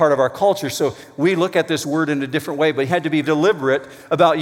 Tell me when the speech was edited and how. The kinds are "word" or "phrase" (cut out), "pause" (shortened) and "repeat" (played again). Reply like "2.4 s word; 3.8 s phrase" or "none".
2.9 s word; 3.2 s word